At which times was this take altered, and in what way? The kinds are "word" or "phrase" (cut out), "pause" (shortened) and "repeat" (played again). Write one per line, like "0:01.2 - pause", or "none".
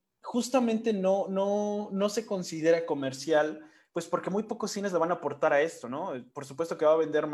none